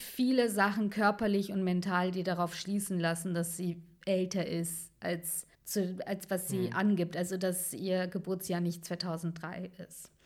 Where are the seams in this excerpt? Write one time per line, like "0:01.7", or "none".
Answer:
0:05.5